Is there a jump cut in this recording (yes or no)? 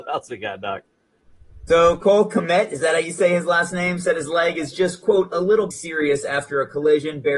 yes